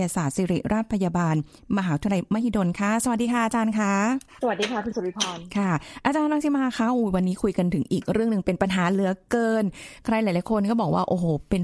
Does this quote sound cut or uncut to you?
uncut